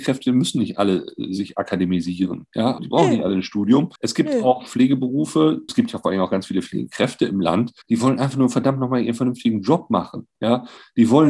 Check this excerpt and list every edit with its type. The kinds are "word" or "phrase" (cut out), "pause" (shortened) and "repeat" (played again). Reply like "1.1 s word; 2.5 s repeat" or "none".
2.8 s word; 4.0 s pause; 5.7 s phrase; 7.8 s pause